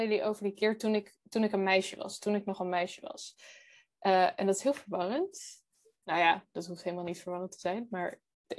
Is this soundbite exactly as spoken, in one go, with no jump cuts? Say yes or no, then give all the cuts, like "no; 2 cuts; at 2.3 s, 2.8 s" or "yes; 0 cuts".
yes; 0 cuts